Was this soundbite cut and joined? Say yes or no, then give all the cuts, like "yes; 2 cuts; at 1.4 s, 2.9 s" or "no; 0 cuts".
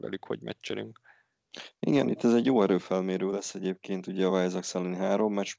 no; 0 cuts